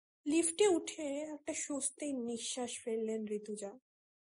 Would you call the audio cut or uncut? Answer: uncut